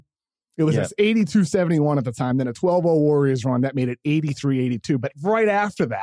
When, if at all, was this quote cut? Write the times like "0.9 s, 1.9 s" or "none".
none